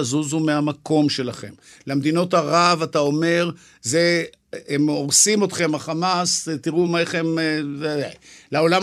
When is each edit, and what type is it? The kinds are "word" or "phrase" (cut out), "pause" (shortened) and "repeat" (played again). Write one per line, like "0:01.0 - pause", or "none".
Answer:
none